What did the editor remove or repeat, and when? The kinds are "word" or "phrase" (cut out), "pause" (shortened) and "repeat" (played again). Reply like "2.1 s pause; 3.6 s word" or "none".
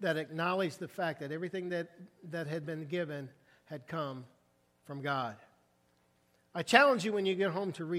none

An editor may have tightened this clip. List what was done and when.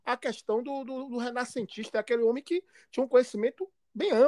none

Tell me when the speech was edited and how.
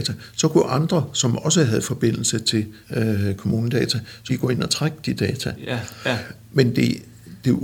2.8 s pause; 4.3 s word

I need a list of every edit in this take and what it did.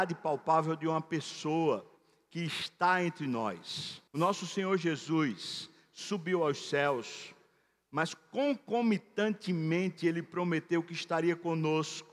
4.1 s pause

